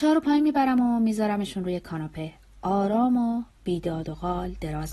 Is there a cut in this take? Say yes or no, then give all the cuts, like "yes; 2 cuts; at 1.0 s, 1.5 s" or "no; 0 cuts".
no; 0 cuts